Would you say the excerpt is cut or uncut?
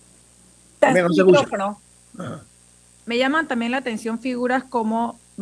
uncut